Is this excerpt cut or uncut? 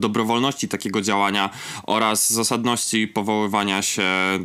uncut